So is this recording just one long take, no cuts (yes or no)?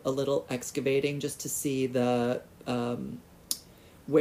yes